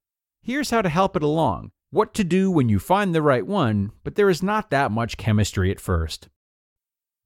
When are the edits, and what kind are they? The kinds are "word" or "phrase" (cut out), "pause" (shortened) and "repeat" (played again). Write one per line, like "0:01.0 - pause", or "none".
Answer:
0:01.8 - pause